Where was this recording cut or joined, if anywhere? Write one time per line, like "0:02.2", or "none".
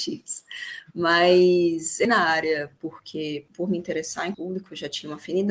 0:02.0
0:03.5
0:04.3